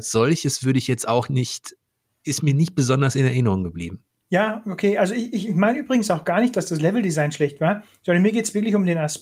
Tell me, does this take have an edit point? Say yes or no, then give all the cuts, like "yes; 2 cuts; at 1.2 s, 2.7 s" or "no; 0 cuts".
no; 0 cuts